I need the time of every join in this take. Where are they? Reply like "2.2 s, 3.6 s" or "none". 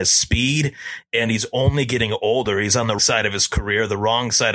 3.0 s